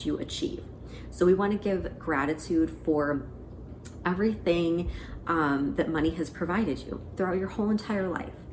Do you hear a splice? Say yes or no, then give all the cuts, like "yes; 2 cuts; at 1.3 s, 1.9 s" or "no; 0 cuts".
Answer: no; 0 cuts